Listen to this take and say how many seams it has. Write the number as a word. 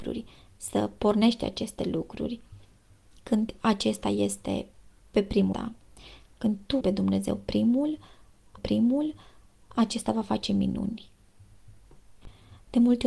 three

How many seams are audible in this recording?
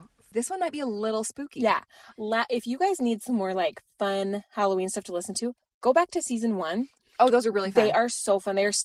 zero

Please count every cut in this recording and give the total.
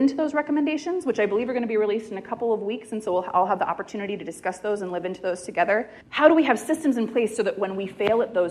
one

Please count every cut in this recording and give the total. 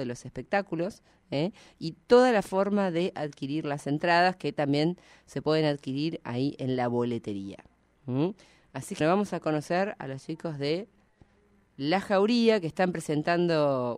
one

